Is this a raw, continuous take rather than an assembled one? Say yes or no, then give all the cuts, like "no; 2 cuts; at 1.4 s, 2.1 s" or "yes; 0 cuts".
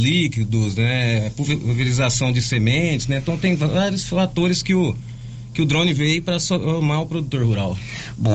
yes; 0 cuts